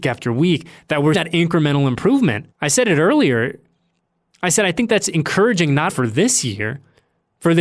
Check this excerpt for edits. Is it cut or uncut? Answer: cut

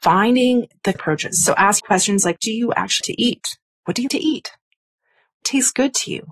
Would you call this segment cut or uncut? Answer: cut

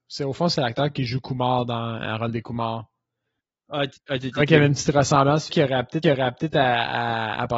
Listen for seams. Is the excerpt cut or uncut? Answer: cut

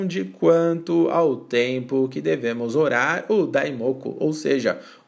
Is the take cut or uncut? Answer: uncut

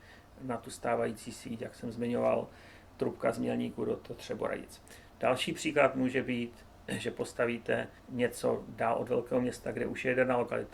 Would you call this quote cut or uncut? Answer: cut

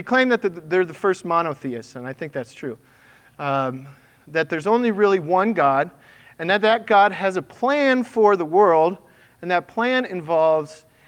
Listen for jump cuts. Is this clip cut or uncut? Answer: uncut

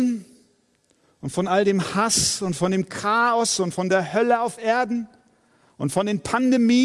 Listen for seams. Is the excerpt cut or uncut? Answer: uncut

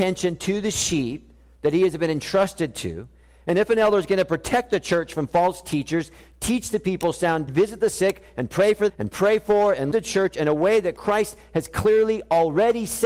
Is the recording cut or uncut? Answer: cut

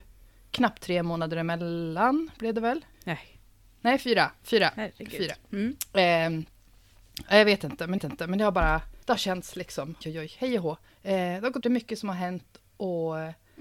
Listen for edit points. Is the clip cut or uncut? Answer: cut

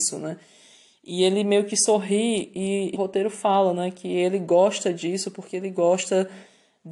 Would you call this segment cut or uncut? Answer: cut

